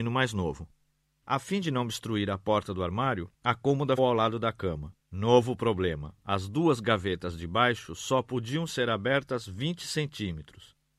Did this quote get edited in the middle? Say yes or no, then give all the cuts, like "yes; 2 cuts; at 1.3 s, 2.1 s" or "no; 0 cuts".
yes; 4 cuts; at 3.3 s, 4.0 s, 5.0 s, 6.2 s